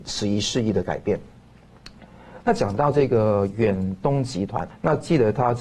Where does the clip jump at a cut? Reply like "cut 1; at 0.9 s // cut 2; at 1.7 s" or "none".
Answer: cut 1; at 4.7 s